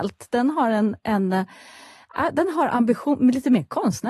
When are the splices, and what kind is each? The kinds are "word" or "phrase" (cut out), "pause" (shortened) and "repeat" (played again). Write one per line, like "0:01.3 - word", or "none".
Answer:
none